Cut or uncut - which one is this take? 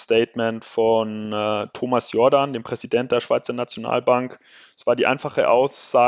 uncut